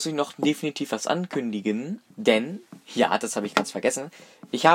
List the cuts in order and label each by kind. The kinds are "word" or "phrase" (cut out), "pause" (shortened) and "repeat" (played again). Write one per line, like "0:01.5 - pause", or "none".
0:02.1 - pause